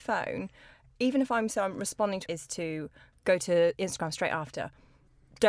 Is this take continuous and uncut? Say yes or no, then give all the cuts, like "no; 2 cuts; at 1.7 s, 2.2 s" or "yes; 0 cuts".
no; 1 cut; at 2.3 s